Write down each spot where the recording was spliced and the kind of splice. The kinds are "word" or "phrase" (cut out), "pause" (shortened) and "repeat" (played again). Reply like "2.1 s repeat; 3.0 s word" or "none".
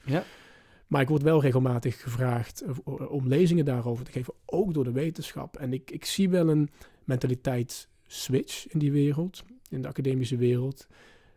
none